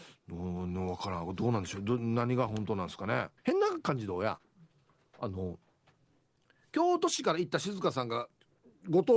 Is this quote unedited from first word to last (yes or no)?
no